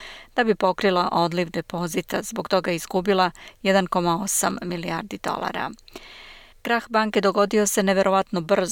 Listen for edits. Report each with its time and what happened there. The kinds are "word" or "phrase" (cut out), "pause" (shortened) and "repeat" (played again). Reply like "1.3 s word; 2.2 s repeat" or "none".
6.5 s pause